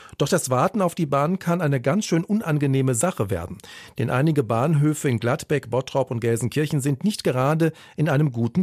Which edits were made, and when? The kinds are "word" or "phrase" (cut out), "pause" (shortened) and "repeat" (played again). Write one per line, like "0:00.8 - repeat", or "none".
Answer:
none